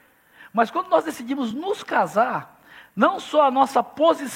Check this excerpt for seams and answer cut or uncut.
uncut